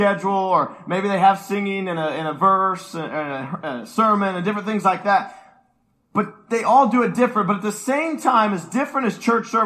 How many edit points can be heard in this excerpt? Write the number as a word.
zero